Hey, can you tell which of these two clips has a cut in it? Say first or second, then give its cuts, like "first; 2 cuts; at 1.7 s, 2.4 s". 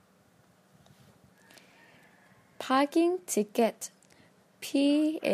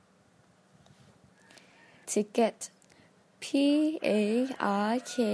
second; 1 cut; at 2.0 s